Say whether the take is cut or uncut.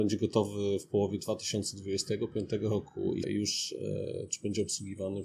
cut